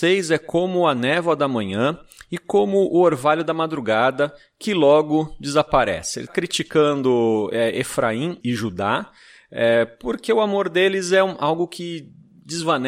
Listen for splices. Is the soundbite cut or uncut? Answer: cut